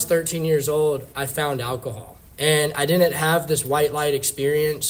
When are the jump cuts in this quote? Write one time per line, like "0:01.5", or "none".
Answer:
0:01.1
0:02.3

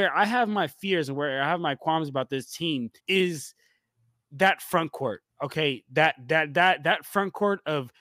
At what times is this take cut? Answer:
0:03.0

